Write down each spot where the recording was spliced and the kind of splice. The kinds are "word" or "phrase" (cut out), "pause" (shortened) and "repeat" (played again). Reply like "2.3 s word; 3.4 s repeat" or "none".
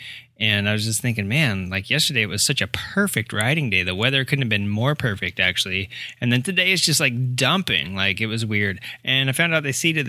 none